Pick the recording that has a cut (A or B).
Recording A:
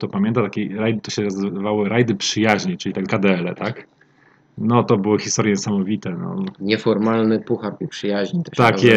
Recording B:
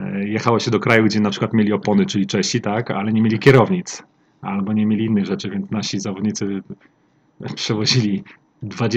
A